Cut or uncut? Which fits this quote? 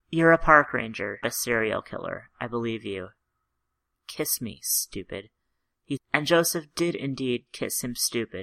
cut